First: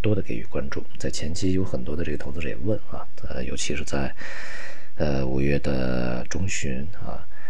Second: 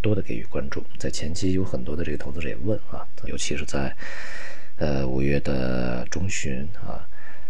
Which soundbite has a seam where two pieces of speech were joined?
second; 1 cut; at 3.3 s

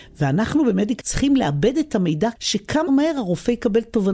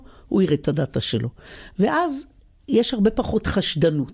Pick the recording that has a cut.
first; 3 cuts; at 1.0 s, 2.4 s, 2.9 s

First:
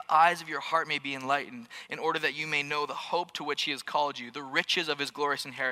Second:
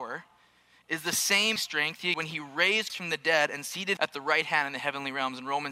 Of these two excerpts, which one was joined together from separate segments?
second; 4 cuts; at 1.6 s, 2.1 s, 2.9 s, 4.0 s

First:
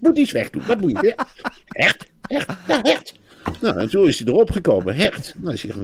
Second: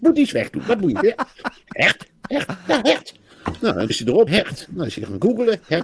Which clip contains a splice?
second; 2 cuts; at 3.9 s, 4.3 s

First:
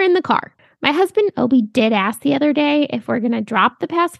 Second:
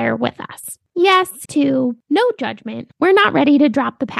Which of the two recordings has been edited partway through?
second; 1 cut; at 1.5 s

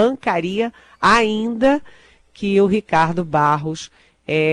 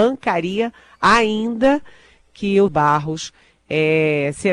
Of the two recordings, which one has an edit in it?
second; 1 cut; at 2.7 s

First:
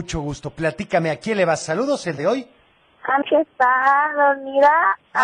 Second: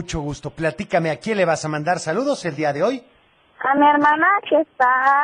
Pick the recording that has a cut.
first; 3 cuts; at 1.6 s, 2.2 s, 3.2 s

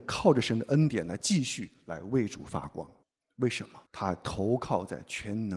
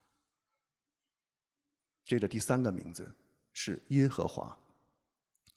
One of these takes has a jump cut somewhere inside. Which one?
first; 2 cuts; at 3.0 s, 3.9 s

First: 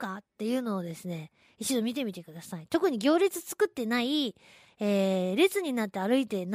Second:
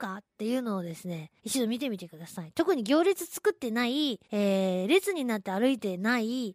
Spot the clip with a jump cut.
second; 2 cuts; at 1.4 s, 4.2 s

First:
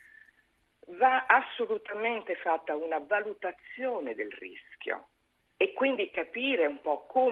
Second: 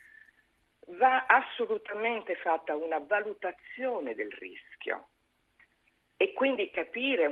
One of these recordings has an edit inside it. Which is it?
first; 1 cut; at 5.4 s

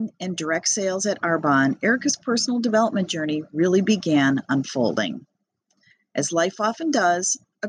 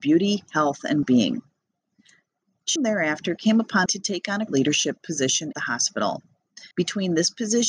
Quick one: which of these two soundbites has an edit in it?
second; 6 cuts; at 1.0 s, 2.8 s, 3.9 s, 4.5 s, 5.5 s, 6.7 s

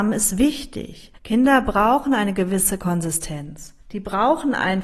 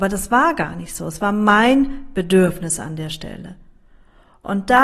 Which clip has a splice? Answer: first; 2 cuts; at 1.2 s, 3.8 s

